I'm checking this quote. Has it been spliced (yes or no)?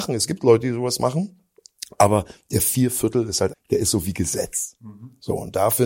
yes